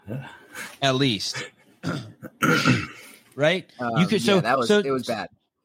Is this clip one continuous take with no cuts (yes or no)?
yes